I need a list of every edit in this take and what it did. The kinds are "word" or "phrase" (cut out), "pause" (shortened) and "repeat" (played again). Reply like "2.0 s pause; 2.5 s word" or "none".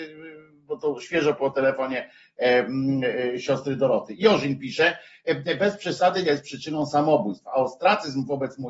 6.2 s phrase

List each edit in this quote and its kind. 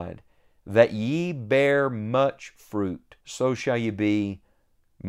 3.2 s pause

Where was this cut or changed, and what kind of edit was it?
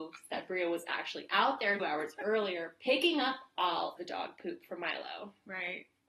1.8 s word; 4.0 s word

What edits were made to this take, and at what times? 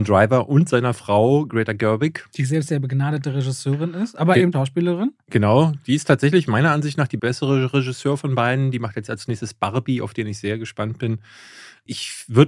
4.5 s word

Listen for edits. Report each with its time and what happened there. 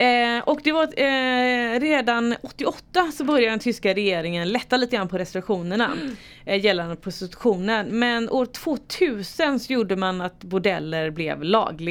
none

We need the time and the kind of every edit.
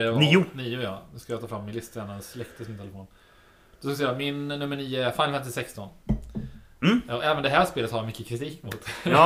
none

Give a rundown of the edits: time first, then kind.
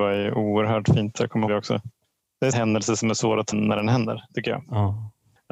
1.5 s word; 2.5 s word; 3.5 s word

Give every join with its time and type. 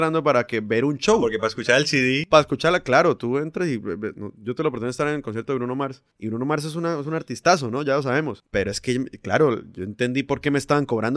none

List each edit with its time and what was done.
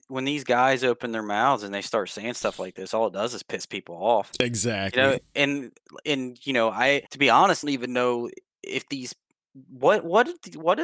7.1 s pause; 7.6 s phrase

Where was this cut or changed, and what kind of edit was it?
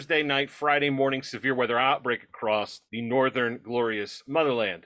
2.9 s pause

